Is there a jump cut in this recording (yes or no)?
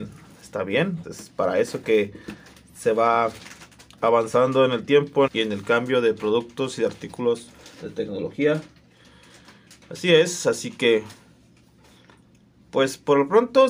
yes